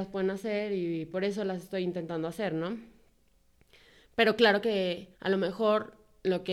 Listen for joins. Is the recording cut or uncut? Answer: cut